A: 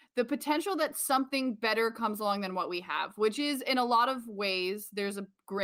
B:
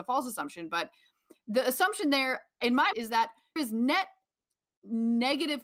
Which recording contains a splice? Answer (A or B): B